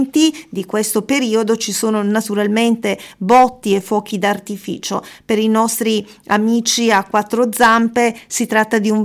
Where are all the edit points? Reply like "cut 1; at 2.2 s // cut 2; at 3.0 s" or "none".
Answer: none

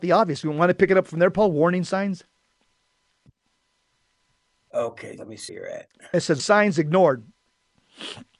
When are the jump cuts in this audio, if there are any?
cut 1; at 5.2 s // cut 2; at 5.5 s // cut 3; at 6.4 s

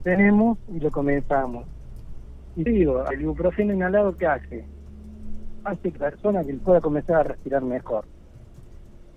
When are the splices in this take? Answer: cut 1; at 2.7 s // cut 2; at 3.1 s // cut 3; at 6.0 s // cut 4; at 6.6 s

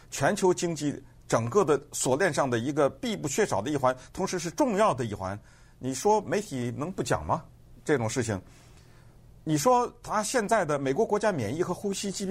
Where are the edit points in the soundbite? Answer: none

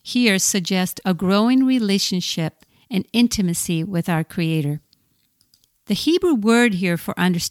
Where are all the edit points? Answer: none

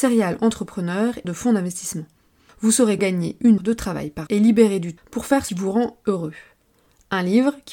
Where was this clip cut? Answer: cut 1; at 1.2 s // cut 2; at 3.0 s // cut 3; at 3.6 s // cut 4; at 4.3 s // cut 5; at 5.0 s // cut 6; at 5.5 s

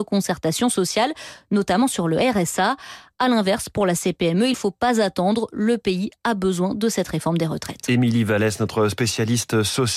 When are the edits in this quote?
cut 1; at 4.5 s

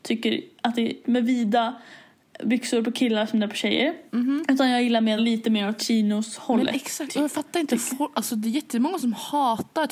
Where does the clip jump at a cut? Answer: cut 1; at 1.0 s // cut 2; at 2.4 s // cut 3; at 4.1 s // cut 4; at 5.2 s // cut 5; at 5.8 s

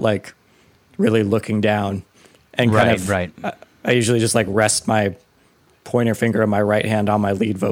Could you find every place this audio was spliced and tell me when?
none

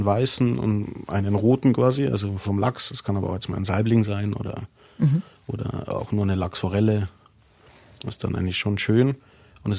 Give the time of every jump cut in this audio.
none

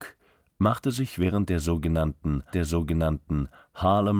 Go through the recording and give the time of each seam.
cut 1; at 2.5 s

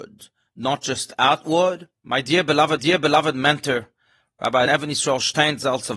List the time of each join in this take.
cut 1; at 2.0 s // cut 2; at 2.8 s // cut 3; at 4.7 s

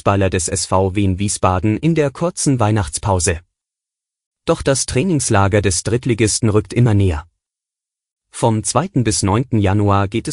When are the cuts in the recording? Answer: none

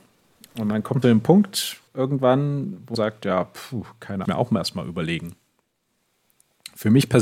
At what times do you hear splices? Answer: cut 1; at 1.0 s // cut 2; at 1.9 s // cut 3; at 2.9 s // cut 4; at 4.2 s

